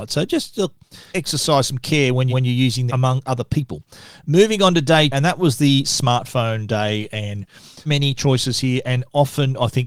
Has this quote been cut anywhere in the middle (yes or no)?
yes